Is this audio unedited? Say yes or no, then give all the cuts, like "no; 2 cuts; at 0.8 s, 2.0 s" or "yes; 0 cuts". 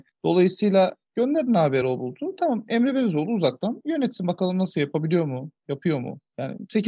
yes; 0 cuts